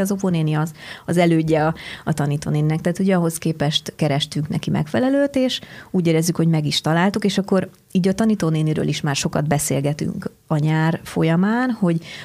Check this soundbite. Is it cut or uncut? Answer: uncut